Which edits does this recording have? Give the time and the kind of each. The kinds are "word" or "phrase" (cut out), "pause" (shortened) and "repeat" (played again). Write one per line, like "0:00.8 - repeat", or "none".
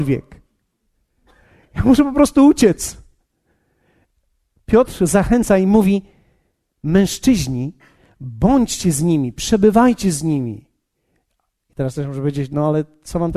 none